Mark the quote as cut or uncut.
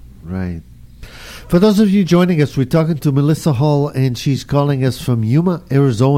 cut